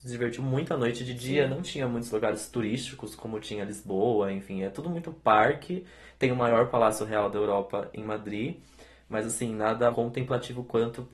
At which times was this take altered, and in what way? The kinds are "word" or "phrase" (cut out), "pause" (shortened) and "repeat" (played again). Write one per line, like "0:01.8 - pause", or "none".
0:09.9 - word